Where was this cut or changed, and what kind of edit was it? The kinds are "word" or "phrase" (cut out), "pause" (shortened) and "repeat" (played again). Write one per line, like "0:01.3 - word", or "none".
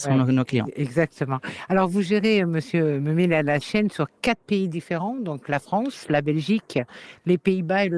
0:03.6 - word